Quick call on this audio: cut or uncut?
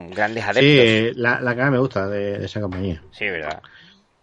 uncut